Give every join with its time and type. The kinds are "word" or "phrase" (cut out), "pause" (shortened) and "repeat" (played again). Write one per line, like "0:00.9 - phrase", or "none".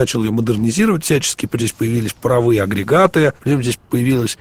0:01.6 - word
0:03.4 - pause